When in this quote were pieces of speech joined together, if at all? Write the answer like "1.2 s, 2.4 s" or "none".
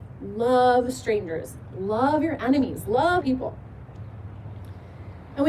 3.2 s